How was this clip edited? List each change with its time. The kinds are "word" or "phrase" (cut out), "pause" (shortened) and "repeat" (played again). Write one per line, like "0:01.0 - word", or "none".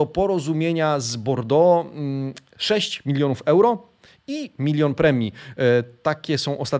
none